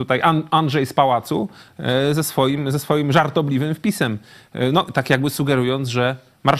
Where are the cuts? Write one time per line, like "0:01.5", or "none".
none